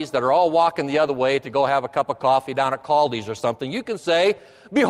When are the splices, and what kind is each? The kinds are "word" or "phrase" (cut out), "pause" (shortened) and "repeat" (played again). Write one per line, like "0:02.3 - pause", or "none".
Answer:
none